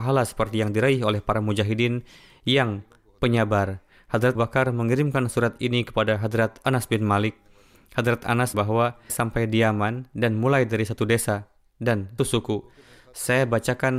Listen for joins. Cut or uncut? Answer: cut